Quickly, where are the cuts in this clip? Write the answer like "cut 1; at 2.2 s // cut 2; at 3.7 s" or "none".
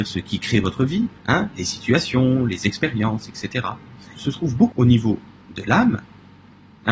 cut 1; at 1.2 s // cut 2; at 4.1 s // cut 3; at 4.7 s